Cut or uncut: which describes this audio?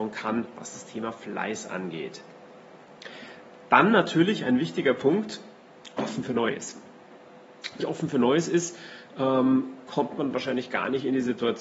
cut